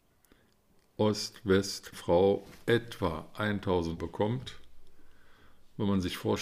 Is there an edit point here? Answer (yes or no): yes